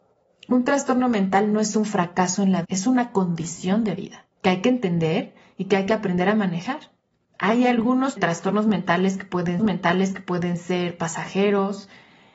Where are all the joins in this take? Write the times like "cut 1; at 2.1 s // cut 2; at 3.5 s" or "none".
cut 1; at 2.6 s // cut 2; at 4.3 s // cut 3; at 7.1 s // cut 4; at 8.2 s // cut 5; at 9.6 s